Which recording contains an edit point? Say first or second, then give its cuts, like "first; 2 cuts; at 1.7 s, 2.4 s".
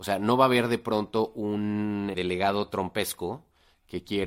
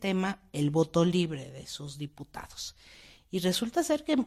first; 1 cut; at 2.1 s